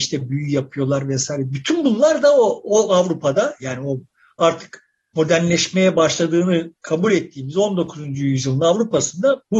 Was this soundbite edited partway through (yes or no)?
no